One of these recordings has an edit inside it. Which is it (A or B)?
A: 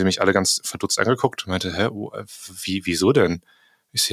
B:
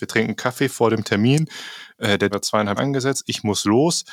B